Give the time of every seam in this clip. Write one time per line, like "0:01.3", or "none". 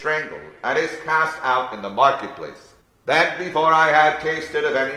0:02.8